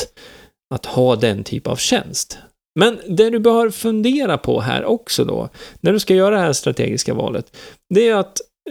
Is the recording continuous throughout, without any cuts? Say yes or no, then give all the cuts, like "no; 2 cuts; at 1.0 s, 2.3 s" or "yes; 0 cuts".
yes; 0 cuts